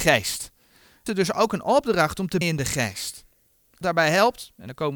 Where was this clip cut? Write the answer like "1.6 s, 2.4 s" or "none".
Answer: 1.1 s, 2.4 s, 3.8 s

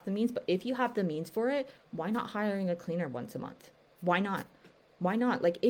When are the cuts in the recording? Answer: none

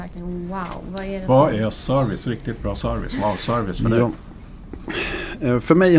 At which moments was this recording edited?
none

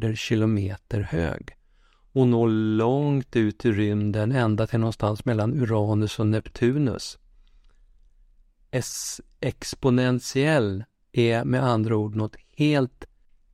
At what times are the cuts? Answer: none

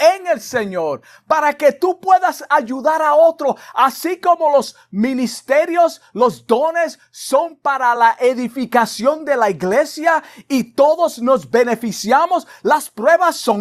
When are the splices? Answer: none

